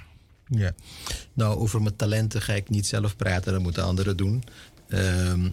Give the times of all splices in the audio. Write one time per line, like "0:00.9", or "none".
none